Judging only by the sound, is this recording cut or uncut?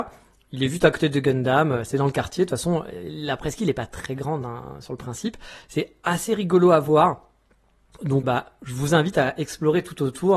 cut